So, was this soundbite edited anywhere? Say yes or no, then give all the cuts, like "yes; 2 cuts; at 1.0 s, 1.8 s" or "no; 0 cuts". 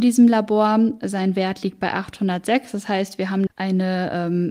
yes; 1 cut; at 3.5 s